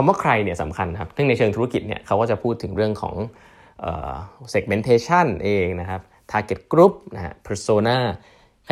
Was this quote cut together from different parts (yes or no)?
no